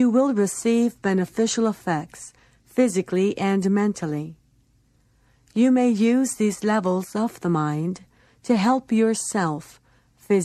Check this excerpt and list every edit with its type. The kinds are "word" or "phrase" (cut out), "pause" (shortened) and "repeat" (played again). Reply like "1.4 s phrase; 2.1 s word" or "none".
none